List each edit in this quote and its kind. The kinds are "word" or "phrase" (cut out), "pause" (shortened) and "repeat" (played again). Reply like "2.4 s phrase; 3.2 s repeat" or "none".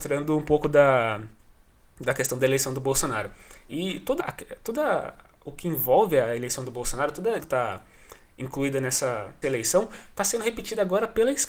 4.2 s word; 7.4 s word; 9.4 s word